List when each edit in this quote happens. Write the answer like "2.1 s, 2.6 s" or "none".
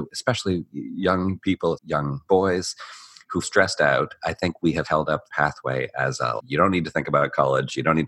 1.7 s, 2.3 s, 3.4 s, 4.8 s, 5.3 s, 6.4 s